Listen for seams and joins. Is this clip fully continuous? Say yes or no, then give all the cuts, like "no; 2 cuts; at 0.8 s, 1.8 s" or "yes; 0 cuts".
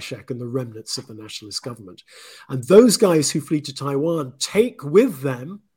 yes; 0 cuts